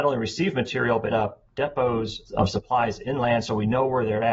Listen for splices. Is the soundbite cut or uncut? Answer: cut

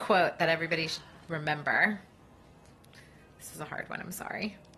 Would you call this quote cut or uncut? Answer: uncut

